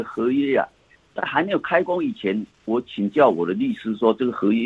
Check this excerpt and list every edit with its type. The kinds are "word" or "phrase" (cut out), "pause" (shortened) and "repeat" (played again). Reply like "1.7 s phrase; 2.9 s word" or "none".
none